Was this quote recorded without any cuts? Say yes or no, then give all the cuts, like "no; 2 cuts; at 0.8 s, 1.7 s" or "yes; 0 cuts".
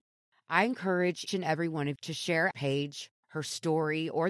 no; 4 cuts; at 1.3 s, 2.0 s, 2.5 s, 3.2 s